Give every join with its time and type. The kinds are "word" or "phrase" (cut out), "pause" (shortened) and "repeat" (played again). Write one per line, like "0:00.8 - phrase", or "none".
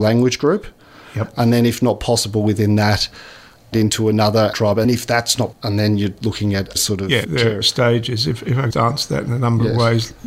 0:03.7 - word
0:04.5 - word
0:04.8 - word
0:05.5 - word
0:06.8 - word
0:07.2 - word
0:07.6 - word
0:08.7 - word